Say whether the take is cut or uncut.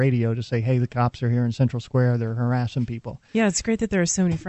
uncut